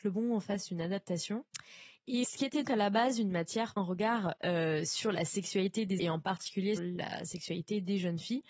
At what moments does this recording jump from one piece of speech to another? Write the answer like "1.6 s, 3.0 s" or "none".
2.2 s, 2.6 s, 3.8 s, 4.4 s, 6.0 s, 6.8 s